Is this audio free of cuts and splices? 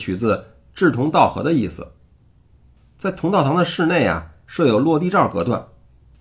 yes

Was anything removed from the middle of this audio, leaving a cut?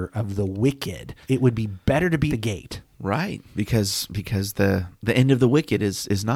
yes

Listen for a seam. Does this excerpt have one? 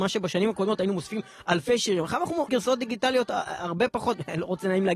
yes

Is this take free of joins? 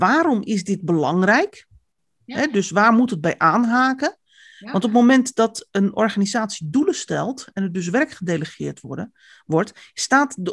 yes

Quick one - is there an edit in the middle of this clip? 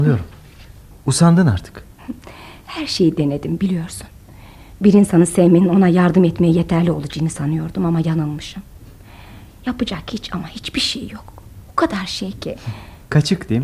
no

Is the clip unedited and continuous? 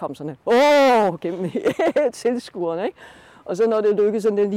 yes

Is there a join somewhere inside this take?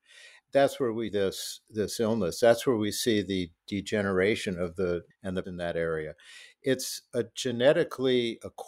yes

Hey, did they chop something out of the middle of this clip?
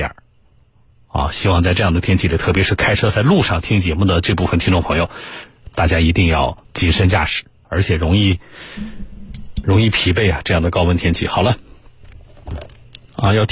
yes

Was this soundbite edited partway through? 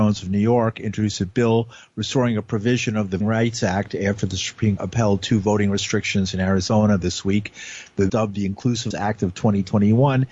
yes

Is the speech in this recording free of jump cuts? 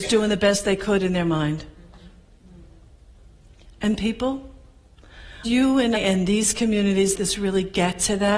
no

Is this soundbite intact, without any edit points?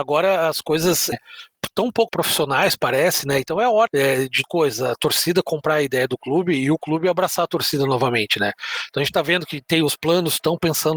no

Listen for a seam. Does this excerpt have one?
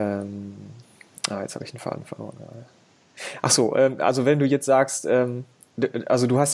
no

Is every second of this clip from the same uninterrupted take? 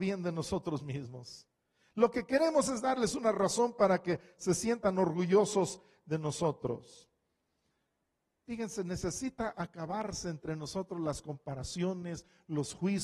yes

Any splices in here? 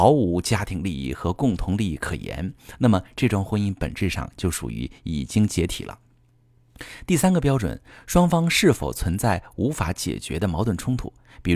no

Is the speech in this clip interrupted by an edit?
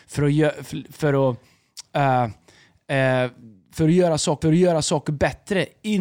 yes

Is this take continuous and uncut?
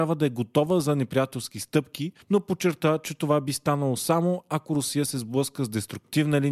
no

